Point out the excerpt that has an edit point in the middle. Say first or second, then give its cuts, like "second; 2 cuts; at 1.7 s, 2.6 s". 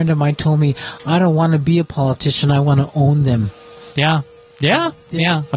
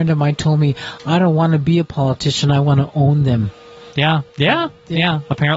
second; 1 cut; at 4.3 s